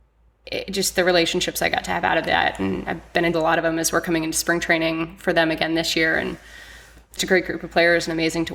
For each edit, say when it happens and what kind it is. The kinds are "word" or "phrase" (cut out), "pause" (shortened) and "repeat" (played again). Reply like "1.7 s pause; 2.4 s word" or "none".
3.3 s phrase; 7.2 s word